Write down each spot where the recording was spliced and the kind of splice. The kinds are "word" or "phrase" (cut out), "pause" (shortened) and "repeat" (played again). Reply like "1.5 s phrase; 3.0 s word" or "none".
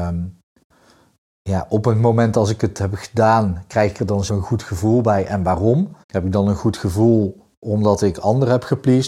4.3 s word; 6.0 s pause